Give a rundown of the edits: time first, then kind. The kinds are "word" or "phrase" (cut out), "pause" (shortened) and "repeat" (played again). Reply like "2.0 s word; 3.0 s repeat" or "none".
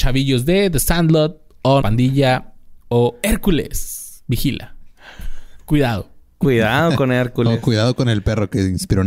1.8 s word